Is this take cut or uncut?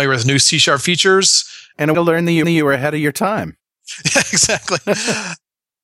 cut